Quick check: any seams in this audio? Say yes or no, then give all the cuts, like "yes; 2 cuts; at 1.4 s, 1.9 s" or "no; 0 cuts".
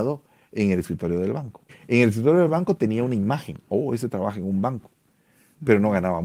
yes; 1 cut; at 1.7 s